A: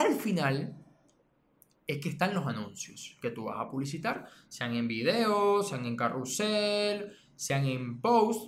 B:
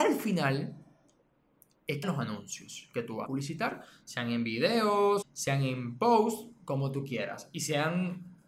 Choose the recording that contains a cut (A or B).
B